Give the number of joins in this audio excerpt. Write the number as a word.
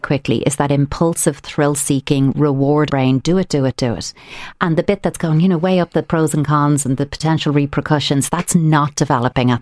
one